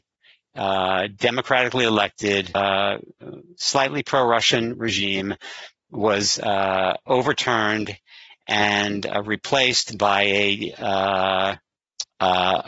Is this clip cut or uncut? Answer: uncut